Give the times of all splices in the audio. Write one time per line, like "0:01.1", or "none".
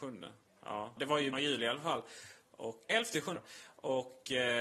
0:01.0
0:01.3
0:02.9
0:03.4